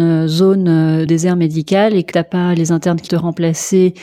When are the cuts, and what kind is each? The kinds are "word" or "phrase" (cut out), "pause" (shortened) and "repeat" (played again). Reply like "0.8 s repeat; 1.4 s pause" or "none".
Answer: 1.1 s word; 2.1 s word; 3.1 s word